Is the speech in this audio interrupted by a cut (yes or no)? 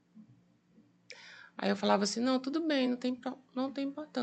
no